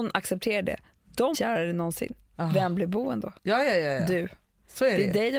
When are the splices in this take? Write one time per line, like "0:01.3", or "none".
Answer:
0:01.3
0:03.4

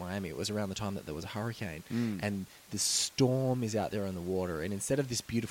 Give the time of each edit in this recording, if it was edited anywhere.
none

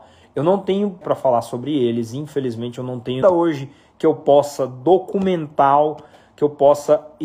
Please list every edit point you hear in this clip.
0:01.0
0:03.2

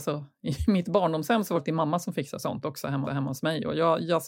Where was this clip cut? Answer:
0:01.6
0:03.1

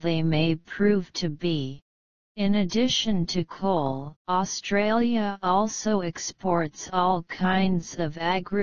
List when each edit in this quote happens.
0:02.0
0:04.2

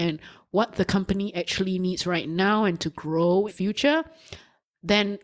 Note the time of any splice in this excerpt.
0:03.5

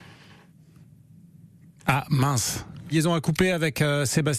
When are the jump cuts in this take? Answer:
0:02.9

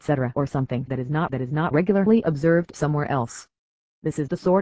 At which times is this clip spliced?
0:01.3

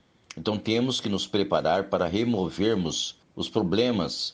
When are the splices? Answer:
0:03.2

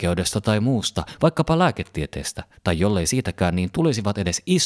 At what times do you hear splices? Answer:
none

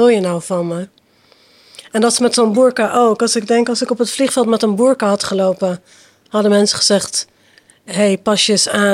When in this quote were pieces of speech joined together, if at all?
none

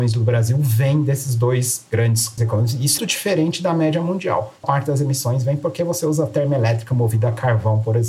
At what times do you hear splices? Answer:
0:02.4
0:03.0
0:04.6

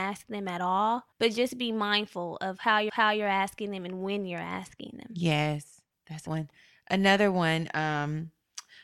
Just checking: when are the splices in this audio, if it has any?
0:01.1
0:02.9
0:05.9
0:06.3

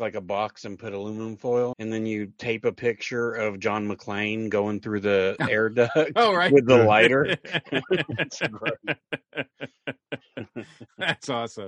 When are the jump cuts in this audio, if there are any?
0:01.7

